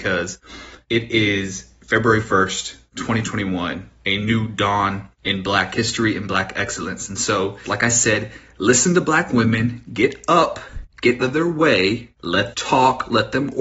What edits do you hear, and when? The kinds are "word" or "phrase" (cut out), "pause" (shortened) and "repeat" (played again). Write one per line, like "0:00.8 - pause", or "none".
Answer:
0:07.7 - word
0:11.2 - word
0:12.5 - word